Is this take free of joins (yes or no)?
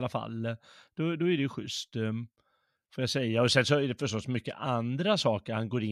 yes